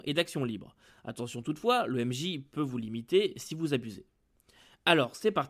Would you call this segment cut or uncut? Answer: uncut